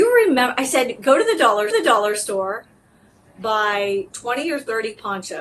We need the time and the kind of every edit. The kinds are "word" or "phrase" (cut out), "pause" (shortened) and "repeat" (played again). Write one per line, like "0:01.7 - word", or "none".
0:01.7 - repeat
0:04.1 - pause